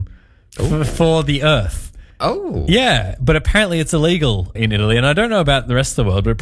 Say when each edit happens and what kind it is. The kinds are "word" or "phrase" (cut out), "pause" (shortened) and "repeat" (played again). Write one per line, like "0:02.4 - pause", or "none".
0:02.1 - pause
0:04.6 - word